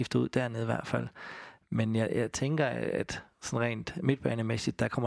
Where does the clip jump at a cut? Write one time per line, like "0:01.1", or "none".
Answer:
none